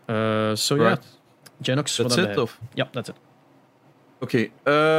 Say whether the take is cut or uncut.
cut